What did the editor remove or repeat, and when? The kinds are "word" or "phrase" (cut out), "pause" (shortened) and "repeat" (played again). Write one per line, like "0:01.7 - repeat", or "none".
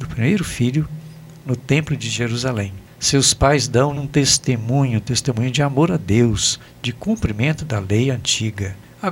0:04.0 - word